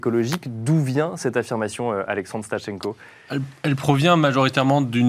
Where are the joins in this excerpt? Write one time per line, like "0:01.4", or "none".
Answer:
none